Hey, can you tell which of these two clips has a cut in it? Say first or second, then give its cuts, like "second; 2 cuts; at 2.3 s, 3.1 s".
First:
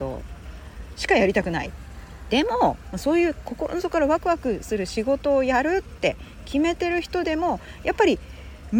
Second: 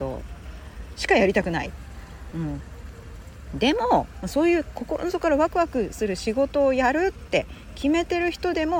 first; 1 cut; at 2.3 s